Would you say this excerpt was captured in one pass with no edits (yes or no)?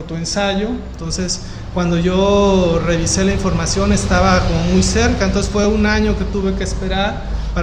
yes